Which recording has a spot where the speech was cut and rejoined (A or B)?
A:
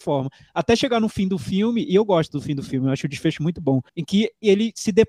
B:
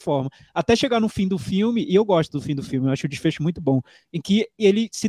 A